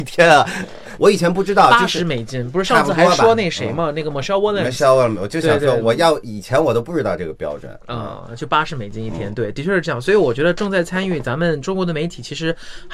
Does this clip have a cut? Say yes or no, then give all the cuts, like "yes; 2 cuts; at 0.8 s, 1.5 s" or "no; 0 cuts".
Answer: no; 0 cuts